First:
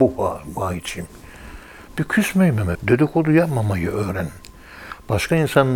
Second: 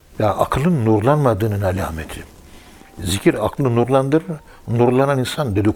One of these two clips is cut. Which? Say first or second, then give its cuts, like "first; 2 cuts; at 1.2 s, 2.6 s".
first; 1 cut; at 2.7 s